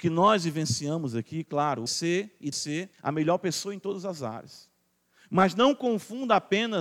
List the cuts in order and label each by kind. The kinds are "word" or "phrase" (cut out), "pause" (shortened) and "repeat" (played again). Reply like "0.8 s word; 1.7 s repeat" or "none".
1.9 s phrase; 2.5 s word; 2.9 s pause; 4.9 s pause